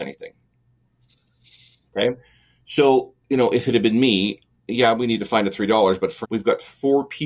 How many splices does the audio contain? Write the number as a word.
two